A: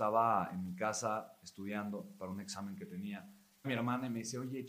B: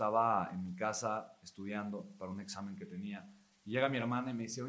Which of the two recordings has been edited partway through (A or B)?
A